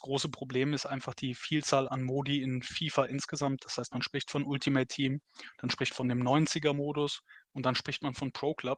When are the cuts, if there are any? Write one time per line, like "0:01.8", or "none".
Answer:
0:01.9
0:05.9

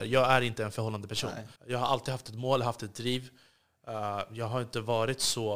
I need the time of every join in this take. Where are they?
0:01.6

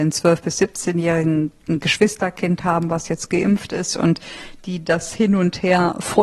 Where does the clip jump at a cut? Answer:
none

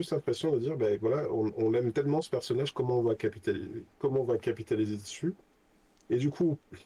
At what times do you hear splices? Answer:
none

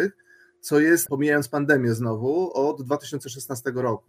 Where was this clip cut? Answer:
0:01.1

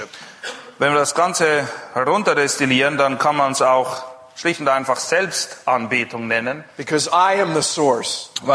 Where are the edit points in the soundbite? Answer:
none

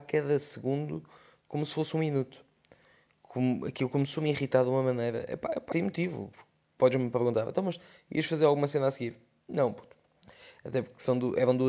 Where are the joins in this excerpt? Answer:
0:05.7

